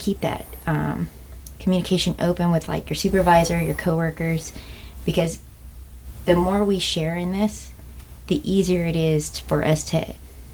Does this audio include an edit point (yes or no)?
no